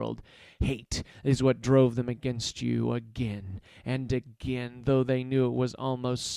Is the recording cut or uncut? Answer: uncut